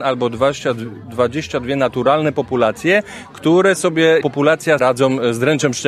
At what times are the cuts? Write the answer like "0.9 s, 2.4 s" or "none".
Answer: 4.2 s, 4.8 s